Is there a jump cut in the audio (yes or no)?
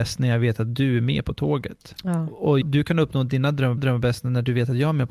yes